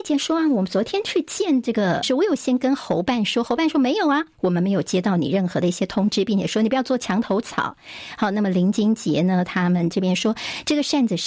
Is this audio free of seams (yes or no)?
no